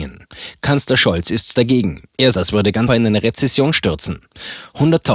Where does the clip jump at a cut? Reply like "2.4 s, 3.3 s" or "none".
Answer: 1.5 s, 2.3 s, 2.9 s